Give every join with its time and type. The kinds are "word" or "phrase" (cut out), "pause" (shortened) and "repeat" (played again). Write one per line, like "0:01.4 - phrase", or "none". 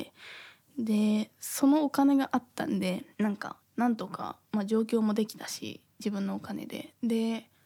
0:03.1 - pause
0:03.6 - pause
0:04.4 - pause